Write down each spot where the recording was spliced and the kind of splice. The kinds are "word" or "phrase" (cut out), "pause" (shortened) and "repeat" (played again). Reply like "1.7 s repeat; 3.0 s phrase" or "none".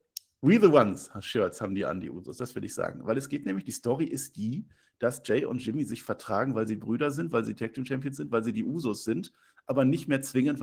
none